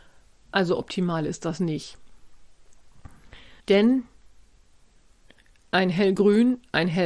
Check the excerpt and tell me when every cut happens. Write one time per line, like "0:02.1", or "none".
0:03.6